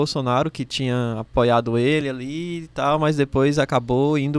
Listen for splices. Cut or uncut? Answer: uncut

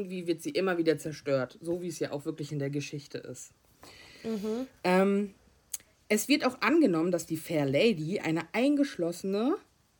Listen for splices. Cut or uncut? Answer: uncut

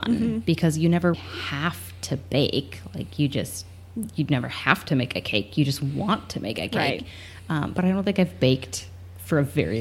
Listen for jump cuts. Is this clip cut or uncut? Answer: cut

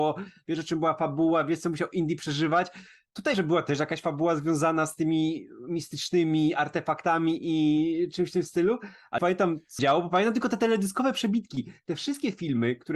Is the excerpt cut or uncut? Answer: cut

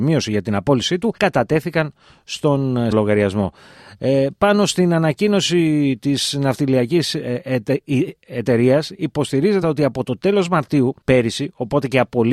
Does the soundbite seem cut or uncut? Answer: cut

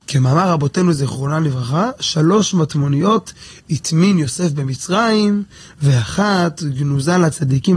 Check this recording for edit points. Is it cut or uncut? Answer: uncut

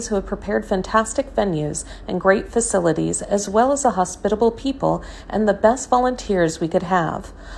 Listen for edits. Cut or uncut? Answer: uncut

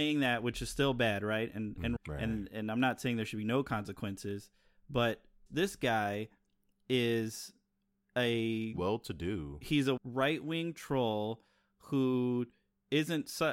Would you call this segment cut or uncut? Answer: cut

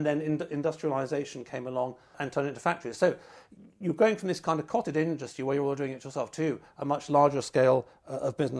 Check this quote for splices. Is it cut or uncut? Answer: uncut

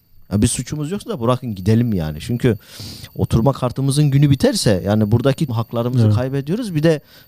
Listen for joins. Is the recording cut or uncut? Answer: cut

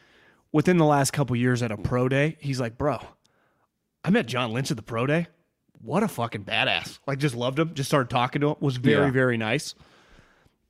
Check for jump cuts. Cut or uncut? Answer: uncut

